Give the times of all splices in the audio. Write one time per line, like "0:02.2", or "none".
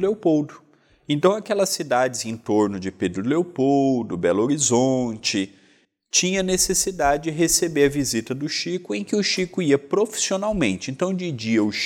none